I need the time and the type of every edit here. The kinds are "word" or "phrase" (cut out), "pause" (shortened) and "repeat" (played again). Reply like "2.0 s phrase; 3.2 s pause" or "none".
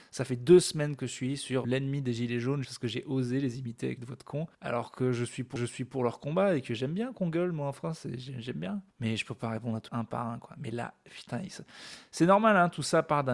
1.6 s word; 2.6 s word; 4.0 s phrase; 4.5 s pause; 5.6 s repeat; 8.9 s pause; 9.9 s phrase